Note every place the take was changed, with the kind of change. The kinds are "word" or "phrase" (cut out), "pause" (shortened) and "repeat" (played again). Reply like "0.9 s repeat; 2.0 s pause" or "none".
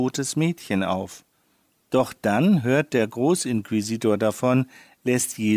none

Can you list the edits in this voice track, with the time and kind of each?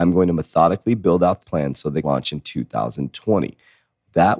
1.4 s word; 2.0 s word

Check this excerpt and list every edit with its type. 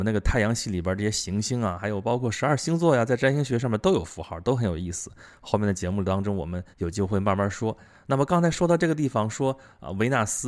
6.7 s pause

